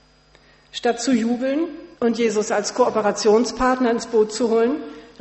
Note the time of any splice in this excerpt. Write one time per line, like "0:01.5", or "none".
0:01.9